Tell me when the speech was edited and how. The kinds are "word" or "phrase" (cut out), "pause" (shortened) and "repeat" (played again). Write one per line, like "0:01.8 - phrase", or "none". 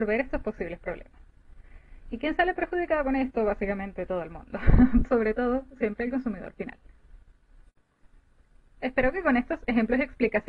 0:05.0 - word
0:05.8 - word